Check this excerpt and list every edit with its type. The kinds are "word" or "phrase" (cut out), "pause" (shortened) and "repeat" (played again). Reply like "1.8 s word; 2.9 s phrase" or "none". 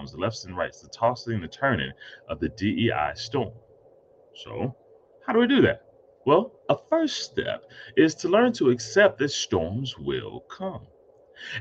none